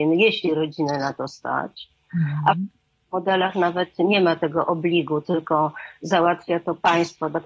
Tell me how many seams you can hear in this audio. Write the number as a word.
zero